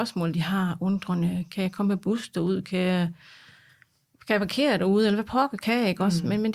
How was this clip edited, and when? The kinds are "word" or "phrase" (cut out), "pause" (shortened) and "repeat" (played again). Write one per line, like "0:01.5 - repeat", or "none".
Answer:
none